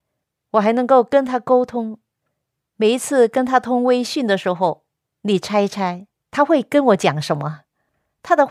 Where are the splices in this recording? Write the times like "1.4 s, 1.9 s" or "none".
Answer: none